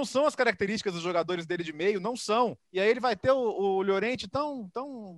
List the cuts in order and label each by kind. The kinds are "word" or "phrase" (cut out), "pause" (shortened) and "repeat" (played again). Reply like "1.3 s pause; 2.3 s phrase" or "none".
2.6 s pause